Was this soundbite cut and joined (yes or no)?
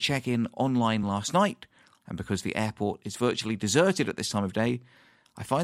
no